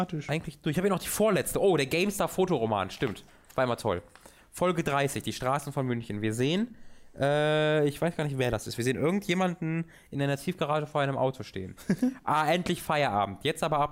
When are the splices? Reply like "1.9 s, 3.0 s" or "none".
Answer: none